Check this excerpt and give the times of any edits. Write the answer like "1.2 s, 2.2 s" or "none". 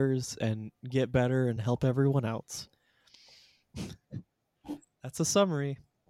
none